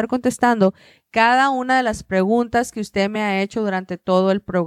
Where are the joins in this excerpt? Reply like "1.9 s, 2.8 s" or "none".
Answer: none